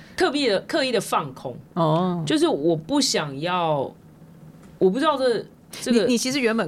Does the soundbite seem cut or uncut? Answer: cut